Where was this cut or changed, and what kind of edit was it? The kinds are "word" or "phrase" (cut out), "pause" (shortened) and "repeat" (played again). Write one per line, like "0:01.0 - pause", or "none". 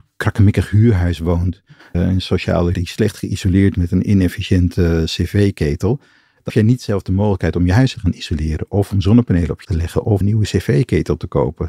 0:01.9 - word
0:02.7 - word
0:03.7 - word
0:06.5 - word
0:07.9 - word
0:09.6 - word
0:10.2 - word